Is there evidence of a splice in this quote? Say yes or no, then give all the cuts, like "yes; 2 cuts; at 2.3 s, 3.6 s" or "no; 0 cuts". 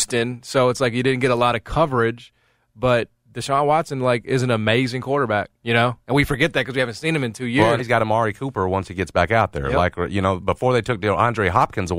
yes; 2 cuts; at 5.6 s, 7.8 s